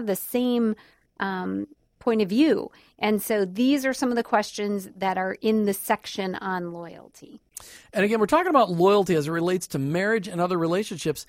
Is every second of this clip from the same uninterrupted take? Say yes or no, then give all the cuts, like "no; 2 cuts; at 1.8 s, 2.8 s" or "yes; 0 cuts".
yes; 0 cuts